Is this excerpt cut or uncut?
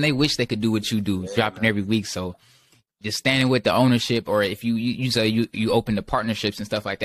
uncut